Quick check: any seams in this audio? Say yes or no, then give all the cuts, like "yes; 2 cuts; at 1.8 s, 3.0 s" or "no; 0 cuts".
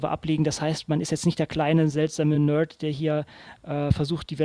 no; 0 cuts